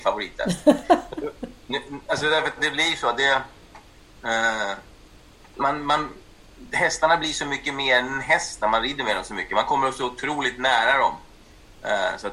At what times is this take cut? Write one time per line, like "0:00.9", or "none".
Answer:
0:05.2